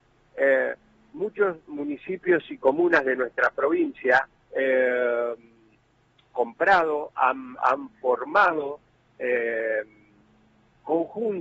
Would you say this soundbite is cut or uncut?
cut